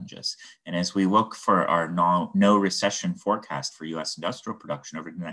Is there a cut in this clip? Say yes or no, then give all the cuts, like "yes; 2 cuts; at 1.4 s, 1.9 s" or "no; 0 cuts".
no; 0 cuts